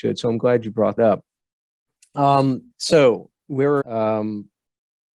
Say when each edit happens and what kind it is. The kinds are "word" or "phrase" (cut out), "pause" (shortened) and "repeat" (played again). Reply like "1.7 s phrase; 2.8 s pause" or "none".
1.0 s word; 2.7 s pause; 3.8 s word